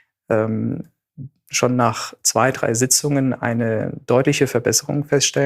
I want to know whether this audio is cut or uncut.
uncut